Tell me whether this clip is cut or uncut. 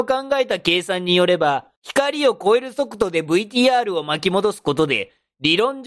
cut